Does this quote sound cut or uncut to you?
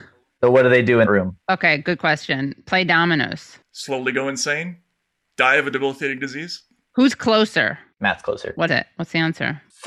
cut